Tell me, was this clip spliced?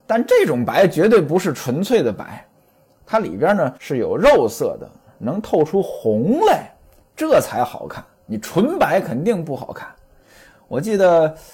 yes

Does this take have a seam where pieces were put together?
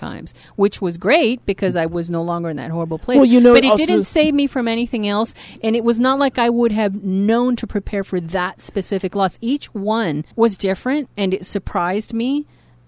yes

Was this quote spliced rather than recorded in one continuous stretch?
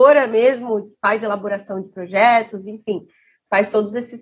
no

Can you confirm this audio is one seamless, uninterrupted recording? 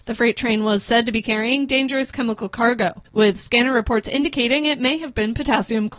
no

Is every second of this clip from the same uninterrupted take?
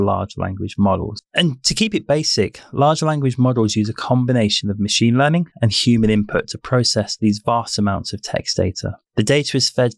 no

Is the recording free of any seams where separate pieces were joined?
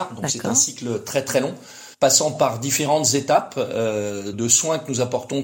no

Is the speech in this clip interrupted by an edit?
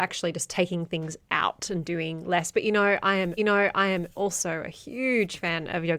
yes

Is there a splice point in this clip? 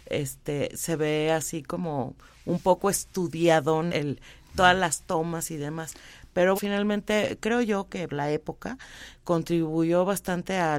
yes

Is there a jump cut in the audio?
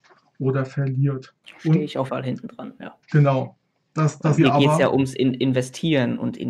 yes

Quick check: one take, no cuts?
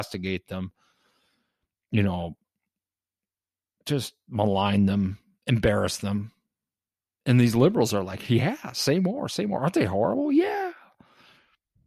yes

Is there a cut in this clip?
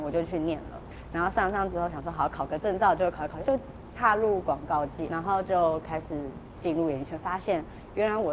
yes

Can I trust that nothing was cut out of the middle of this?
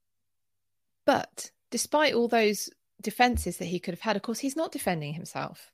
yes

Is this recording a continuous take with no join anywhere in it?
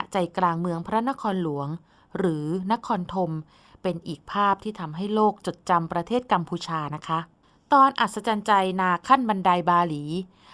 yes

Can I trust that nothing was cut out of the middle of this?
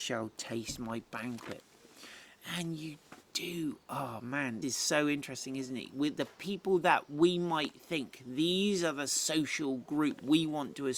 no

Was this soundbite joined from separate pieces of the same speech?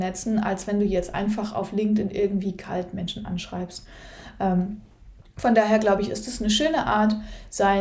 yes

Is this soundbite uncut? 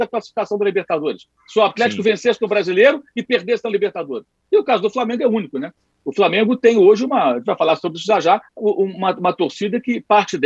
no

